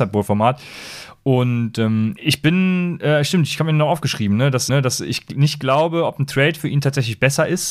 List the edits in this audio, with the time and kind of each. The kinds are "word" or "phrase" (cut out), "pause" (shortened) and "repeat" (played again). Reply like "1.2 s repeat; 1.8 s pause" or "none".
2.2 s word; 4.7 s repeat